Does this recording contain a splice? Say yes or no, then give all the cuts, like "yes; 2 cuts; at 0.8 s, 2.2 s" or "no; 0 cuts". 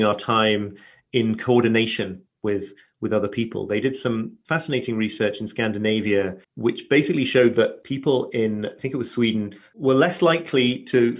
yes; 1 cut; at 6.4 s